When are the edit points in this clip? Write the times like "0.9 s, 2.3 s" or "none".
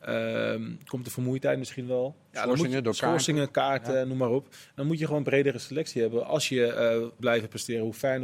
7.2 s